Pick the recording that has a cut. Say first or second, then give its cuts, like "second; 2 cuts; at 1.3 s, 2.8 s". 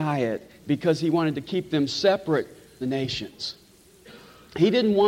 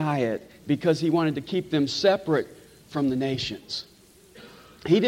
first; 1 cut; at 2.8 s